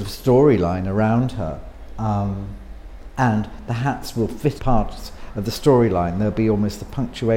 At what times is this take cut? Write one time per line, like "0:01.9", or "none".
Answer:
0:04.6